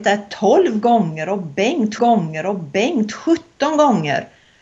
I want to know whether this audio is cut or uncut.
cut